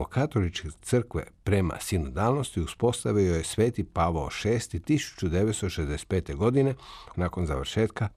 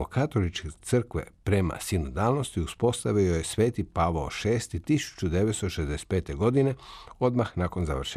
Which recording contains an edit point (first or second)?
first